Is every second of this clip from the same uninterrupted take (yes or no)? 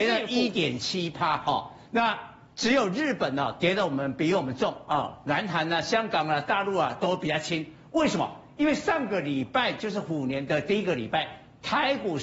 yes